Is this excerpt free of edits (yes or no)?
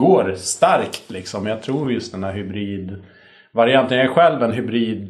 yes